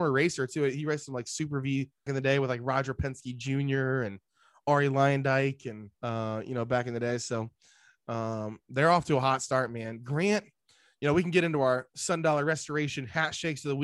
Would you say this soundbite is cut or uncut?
cut